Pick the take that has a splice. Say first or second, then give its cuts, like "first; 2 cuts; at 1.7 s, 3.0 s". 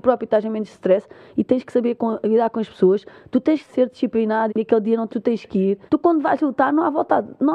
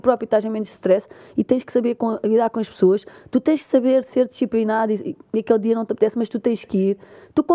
first; 4 cuts; at 3.7 s, 4.5 s, 5.1 s, 5.9 s